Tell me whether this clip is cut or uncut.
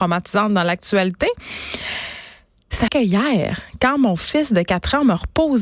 cut